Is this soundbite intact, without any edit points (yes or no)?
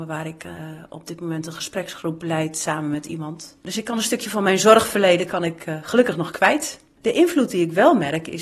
yes